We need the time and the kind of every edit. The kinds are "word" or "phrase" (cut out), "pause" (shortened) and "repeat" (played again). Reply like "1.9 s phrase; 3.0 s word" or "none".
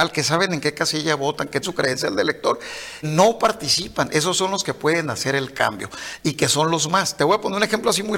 1.6 s word; 3.0 s phrase